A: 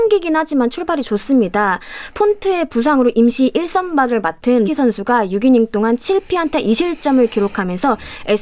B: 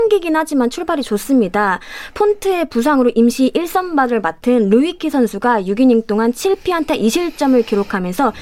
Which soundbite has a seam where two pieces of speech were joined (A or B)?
A